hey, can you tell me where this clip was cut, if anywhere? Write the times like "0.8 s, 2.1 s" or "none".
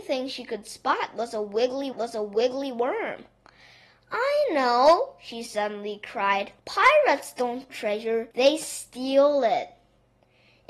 1.9 s, 6.6 s, 7.7 s, 8.3 s